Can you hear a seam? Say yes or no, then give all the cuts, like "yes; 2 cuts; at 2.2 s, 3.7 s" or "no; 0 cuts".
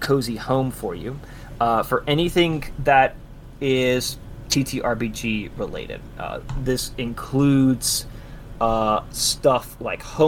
no; 0 cuts